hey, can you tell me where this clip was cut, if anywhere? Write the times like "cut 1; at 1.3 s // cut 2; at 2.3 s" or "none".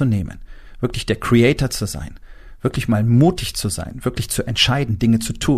none